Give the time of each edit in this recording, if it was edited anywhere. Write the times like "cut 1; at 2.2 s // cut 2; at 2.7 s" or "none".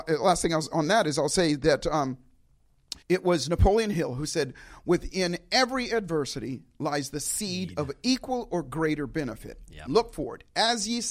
cut 1; at 3.0 s